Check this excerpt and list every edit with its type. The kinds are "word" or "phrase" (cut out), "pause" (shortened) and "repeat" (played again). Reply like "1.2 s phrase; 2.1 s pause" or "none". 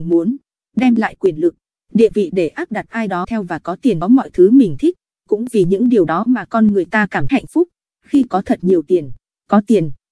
3.2 s word; 4.0 s phrase; 7.3 s word